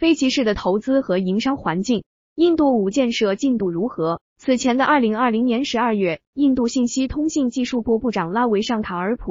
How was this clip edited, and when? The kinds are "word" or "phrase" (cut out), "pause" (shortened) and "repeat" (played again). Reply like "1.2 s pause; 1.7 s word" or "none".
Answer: 2.9 s word; 4.3 s pause